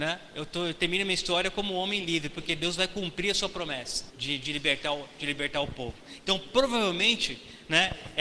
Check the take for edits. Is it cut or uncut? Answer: cut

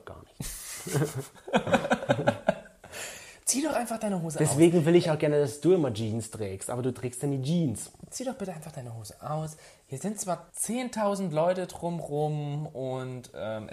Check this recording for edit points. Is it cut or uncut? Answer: cut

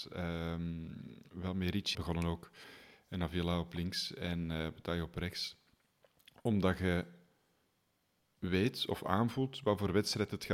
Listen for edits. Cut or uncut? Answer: cut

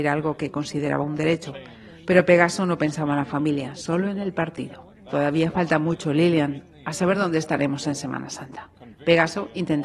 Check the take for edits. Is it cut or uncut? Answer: uncut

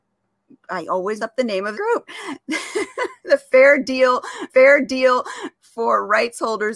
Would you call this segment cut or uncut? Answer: cut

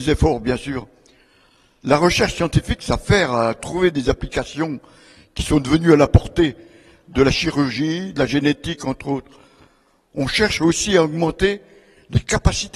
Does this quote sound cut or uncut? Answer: uncut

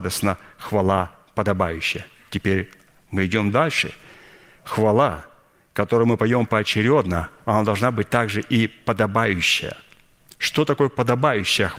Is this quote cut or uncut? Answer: uncut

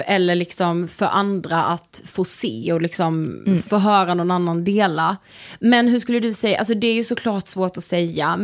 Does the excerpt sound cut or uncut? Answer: uncut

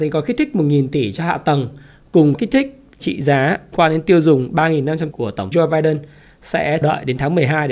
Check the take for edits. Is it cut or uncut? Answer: cut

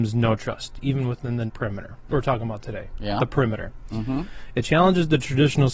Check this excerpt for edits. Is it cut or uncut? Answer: cut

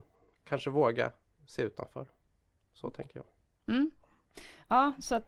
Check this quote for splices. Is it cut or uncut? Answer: uncut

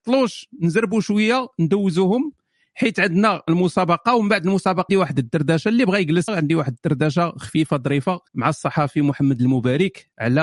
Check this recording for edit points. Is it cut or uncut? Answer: cut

